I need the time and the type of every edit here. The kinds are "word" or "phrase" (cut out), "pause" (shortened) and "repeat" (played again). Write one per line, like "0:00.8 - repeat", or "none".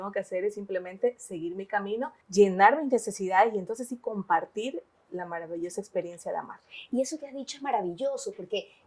0:02.2 - pause